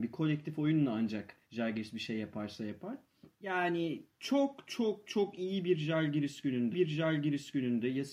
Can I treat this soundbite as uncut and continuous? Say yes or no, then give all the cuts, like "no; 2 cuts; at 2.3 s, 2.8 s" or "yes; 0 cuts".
no; 3 cuts; at 1.4 s, 3.3 s, 6.7 s